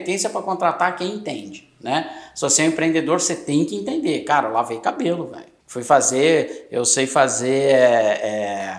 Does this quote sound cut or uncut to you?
cut